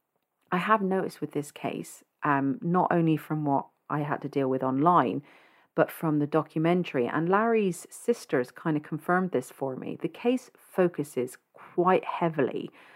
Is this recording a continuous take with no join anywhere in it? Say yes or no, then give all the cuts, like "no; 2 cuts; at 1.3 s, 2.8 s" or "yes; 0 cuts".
yes; 0 cuts